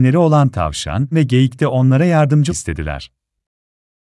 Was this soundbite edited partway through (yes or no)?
yes